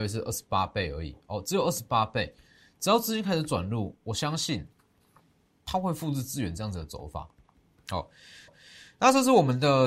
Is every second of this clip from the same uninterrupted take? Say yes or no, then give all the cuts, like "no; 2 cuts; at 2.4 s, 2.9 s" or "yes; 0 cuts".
no; 1 cut; at 8.5 s